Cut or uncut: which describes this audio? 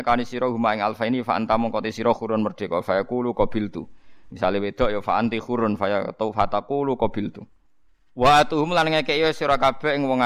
cut